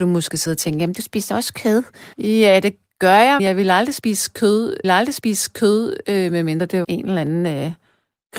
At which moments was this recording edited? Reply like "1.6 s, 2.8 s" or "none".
2.1 s, 3.4 s, 4.8 s, 6.8 s